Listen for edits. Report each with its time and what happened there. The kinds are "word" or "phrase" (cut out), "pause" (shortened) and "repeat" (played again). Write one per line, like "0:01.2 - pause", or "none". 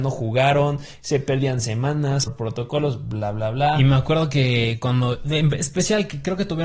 0:02.3 - word